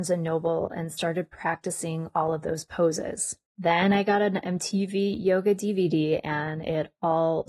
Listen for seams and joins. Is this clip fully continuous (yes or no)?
no